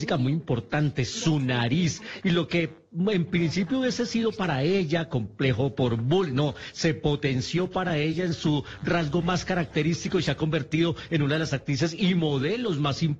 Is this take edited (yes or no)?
no